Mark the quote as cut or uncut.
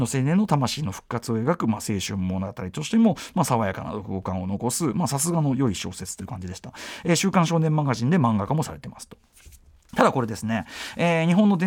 uncut